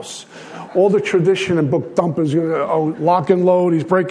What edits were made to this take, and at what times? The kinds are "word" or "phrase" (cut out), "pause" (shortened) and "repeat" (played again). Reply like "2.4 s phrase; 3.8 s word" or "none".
1.7 s word